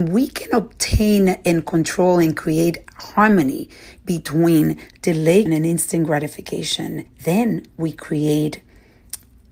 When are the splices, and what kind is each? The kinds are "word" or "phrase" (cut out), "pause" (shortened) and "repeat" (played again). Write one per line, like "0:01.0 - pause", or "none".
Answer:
0:05.5 - word
0:07.1 - pause